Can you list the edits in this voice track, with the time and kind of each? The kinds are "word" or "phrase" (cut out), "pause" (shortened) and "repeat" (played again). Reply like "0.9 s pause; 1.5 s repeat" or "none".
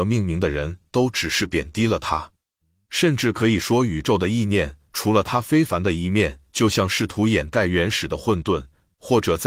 none